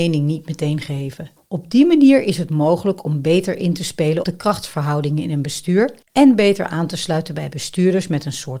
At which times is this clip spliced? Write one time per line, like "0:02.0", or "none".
0:01.4
0:04.2
0:06.0